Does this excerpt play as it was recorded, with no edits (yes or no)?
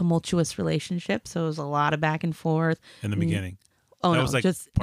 yes